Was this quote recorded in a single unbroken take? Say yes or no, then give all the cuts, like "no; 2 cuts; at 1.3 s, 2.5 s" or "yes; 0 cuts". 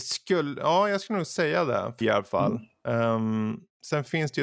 no; 1 cut; at 2.0 s